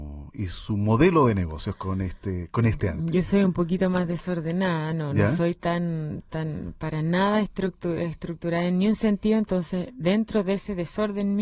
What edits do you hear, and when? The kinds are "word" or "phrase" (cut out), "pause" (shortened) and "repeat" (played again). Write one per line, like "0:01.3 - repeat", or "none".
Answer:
none